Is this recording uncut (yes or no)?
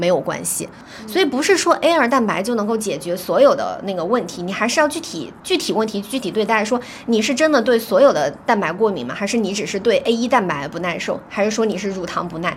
yes